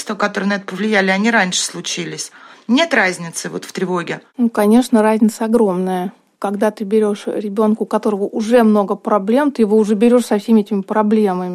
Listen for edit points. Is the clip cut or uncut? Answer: uncut